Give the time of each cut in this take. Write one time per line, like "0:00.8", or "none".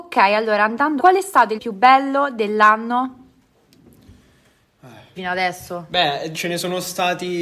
0:01.0
0:01.6
0:05.2
0:06.3